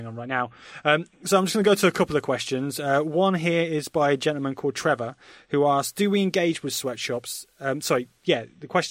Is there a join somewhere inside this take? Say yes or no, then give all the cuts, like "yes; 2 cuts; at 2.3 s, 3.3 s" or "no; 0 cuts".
no; 0 cuts